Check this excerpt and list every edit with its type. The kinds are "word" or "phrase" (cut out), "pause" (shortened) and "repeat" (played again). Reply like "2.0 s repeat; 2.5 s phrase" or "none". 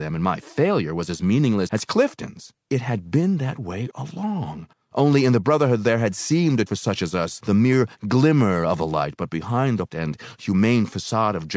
1.7 s word; 2.6 s pause; 3.9 s word; 4.7 s pause; 6.7 s word; 7.4 s word; 9.9 s word